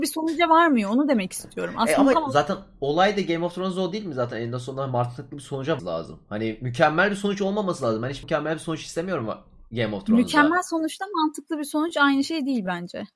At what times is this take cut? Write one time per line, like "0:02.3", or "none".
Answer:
0:02.1
0:05.8
0:08.2